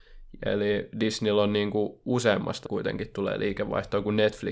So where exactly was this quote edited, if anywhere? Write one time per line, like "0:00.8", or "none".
0:02.7